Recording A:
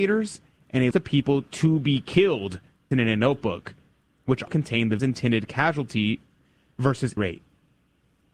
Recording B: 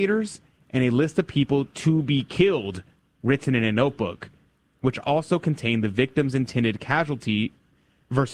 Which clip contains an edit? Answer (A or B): A